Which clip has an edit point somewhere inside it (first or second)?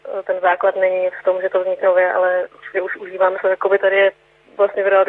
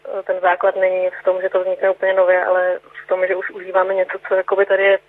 first